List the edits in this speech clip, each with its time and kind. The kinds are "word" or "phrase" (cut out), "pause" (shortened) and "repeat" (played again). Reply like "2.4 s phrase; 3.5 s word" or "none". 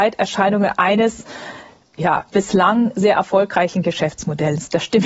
none